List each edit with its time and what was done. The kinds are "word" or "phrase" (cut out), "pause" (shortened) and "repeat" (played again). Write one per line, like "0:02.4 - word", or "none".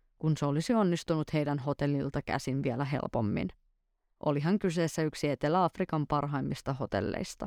none